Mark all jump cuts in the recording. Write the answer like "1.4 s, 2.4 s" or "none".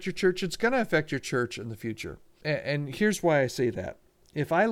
none